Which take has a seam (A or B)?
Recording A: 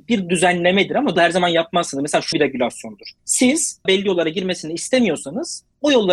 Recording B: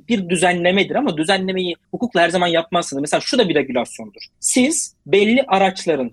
A